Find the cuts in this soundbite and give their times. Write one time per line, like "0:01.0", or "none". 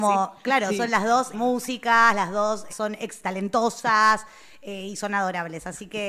0:01.3
0:02.7
0:03.2